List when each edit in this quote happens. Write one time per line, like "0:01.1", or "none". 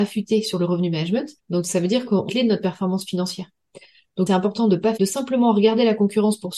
0:01.4
0:02.3
0:04.3
0:05.0